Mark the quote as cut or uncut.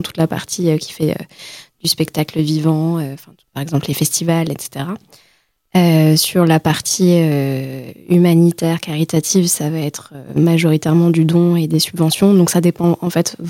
uncut